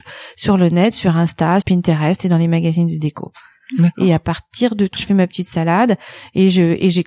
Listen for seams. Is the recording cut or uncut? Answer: cut